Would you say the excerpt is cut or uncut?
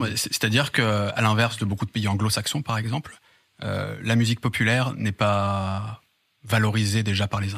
uncut